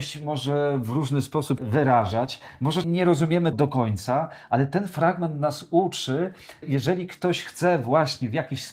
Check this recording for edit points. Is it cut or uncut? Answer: cut